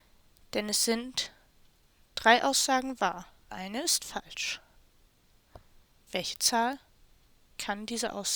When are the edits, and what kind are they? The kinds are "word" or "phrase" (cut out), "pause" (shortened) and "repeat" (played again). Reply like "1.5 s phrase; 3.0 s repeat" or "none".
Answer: 3.5 s word